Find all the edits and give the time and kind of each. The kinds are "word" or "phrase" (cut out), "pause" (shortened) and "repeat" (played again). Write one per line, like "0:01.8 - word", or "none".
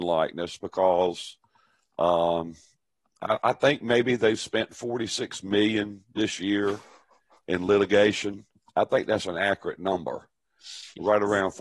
none